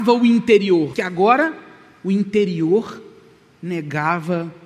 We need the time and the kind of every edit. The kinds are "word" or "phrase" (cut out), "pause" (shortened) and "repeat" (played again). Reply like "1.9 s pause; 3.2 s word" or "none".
0.9 s word

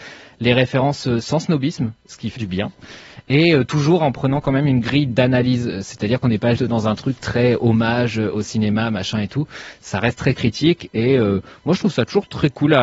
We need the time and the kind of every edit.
2.4 s word; 6.6 s word

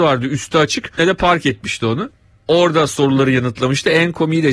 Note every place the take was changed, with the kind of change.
1.0 s phrase

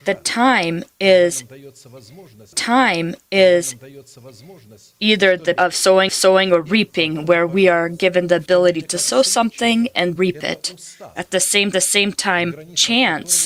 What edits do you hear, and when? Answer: 2.5 s repeat; 5.6 s word; 6.1 s repeat; 10.2 s word; 11.7 s repeat

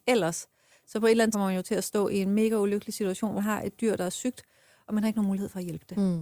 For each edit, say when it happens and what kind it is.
1.3 s word; 3.4 s word

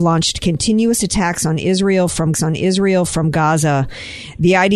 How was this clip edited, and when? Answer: 2.3 s repeat

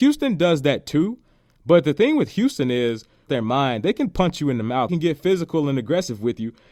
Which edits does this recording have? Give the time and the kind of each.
3.3 s phrase; 4.9 s phrase

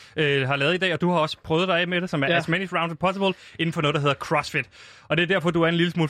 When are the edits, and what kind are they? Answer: none

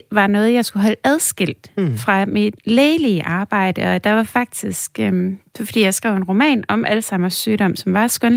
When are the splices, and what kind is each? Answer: none

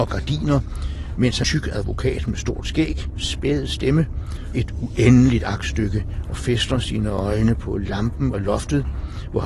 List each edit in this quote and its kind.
1.4 s phrase; 4.5 s word; 8.3 s word

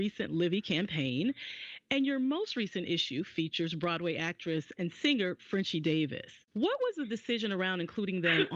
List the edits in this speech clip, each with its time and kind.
6.4 s pause

